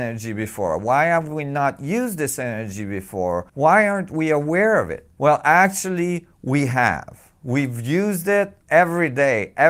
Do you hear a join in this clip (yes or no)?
yes